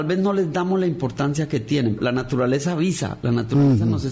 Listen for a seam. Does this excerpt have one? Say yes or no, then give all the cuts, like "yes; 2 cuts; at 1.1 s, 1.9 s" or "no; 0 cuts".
yes; 1 cut; at 2.0 s